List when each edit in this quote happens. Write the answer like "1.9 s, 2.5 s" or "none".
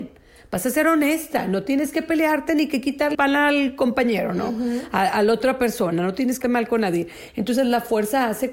3.1 s, 6.4 s